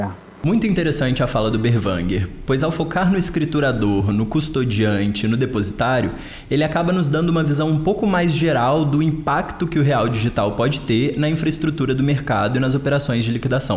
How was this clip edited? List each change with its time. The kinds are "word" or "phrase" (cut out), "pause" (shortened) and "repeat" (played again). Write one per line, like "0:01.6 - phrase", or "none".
none